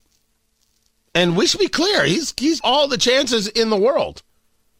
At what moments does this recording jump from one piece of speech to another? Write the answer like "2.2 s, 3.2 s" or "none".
2.6 s